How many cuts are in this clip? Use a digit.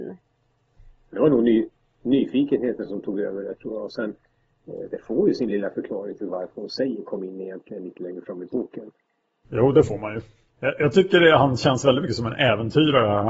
0